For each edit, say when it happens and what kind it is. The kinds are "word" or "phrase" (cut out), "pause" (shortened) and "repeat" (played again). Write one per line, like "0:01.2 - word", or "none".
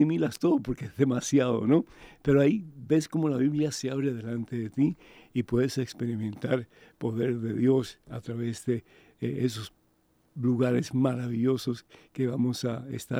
none